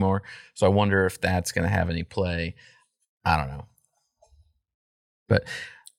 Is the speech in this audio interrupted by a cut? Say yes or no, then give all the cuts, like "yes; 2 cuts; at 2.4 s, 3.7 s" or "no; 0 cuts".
no; 0 cuts